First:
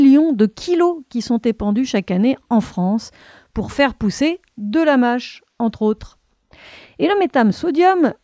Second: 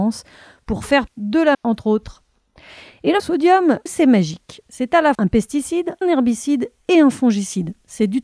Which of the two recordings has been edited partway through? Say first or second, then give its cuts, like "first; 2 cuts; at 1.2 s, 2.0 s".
second; 6 cuts; at 1.1 s, 1.5 s, 3.2 s, 3.9 s, 5.1 s, 6.0 s